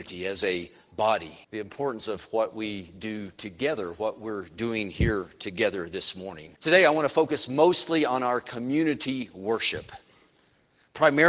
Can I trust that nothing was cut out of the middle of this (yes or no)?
no